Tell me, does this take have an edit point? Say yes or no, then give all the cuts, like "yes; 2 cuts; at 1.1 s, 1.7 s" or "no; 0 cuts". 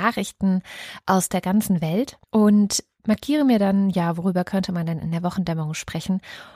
yes; 1 cut; at 2.2 s